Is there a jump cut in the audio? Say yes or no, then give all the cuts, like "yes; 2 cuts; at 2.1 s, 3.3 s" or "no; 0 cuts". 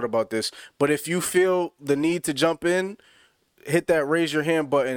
no; 0 cuts